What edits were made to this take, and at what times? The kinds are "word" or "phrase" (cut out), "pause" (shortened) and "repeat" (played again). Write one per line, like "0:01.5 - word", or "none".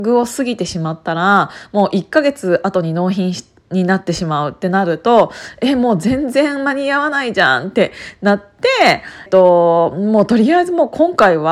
0:09.3 - phrase